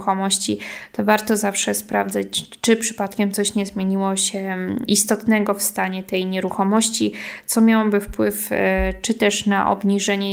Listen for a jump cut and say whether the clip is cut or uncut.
uncut